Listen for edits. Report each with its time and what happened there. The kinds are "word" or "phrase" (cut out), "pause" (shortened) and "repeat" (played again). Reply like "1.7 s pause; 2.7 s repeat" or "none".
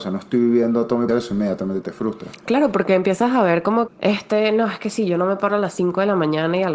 1.1 s word; 3.9 s word